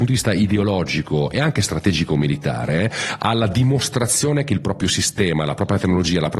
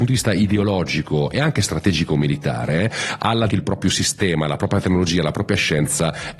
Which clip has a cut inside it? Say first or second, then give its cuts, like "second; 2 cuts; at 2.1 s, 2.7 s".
second; 1 cut; at 3.5 s